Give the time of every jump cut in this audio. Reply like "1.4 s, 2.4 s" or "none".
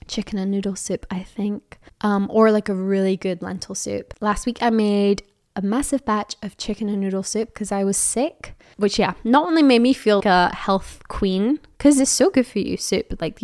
1.9 s, 10.2 s